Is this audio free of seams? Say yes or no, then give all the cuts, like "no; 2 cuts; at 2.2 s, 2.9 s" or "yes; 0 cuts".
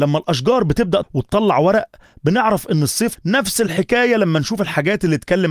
no; 2 cuts; at 1.0 s, 3.2 s